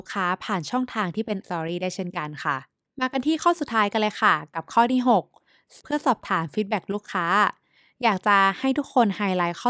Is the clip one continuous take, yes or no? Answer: no